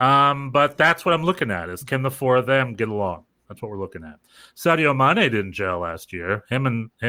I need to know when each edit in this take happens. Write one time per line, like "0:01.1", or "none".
none